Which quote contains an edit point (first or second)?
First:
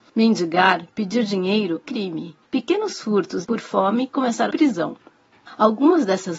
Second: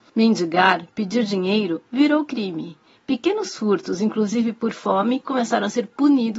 first